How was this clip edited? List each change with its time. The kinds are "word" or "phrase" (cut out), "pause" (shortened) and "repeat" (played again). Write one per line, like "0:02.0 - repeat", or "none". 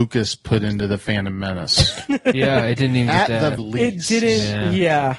0:03.6 - word